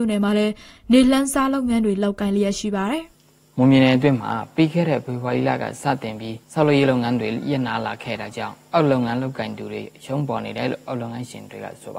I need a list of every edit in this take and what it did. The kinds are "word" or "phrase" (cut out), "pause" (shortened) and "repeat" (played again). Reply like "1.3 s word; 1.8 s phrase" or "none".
3.1 s pause; 6.4 s pause